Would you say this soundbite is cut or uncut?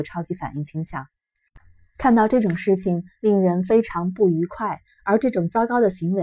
uncut